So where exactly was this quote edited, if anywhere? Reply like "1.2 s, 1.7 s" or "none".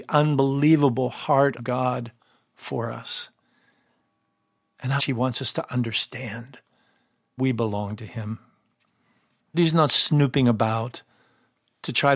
1.6 s, 5.0 s, 7.4 s, 9.5 s